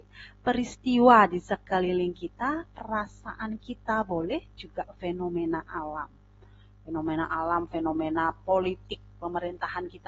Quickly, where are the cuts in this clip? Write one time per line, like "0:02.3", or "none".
none